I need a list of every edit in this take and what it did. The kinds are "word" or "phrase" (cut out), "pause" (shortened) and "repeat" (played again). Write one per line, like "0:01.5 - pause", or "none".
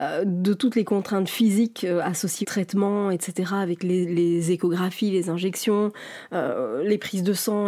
0:02.4 - word